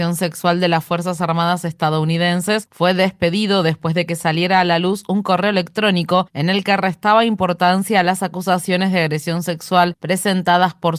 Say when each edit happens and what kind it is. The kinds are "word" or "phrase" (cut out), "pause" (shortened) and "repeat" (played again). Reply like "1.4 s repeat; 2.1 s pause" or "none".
none